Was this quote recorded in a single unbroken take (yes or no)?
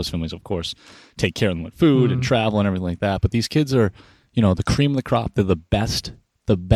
yes